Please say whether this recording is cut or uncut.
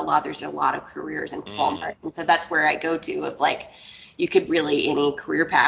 cut